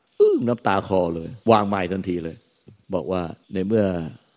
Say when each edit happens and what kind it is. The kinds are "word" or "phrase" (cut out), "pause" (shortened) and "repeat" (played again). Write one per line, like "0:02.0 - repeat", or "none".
0:01.4 - pause
0:02.8 - pause
0:03.4 - pause